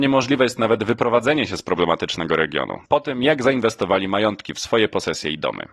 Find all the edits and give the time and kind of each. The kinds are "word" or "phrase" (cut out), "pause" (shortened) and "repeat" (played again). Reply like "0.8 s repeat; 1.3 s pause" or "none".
2.8 s pause